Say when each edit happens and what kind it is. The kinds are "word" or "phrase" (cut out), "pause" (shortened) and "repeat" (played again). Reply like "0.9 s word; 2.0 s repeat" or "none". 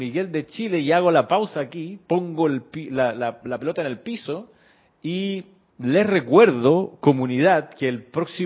4.7 s pause